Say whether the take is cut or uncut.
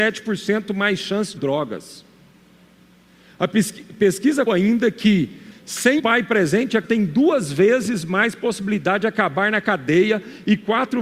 cut